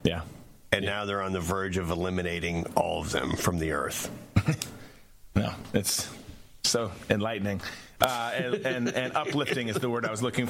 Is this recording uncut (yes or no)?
yes